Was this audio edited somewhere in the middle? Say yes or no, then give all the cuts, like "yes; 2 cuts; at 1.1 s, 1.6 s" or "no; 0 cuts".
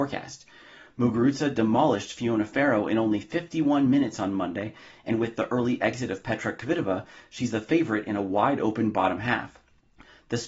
no; 0 cuts